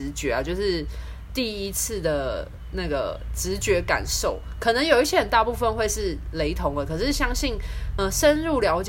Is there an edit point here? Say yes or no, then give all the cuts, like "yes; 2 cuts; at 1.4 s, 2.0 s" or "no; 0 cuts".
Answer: yes; 1 cut; at 8.0 s